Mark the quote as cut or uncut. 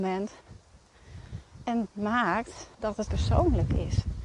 cut